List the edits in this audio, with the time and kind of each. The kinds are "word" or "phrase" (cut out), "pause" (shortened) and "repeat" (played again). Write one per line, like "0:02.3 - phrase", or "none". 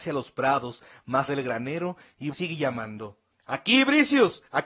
0:01.3 - word
0:02.3 - word
0:03.3 - pause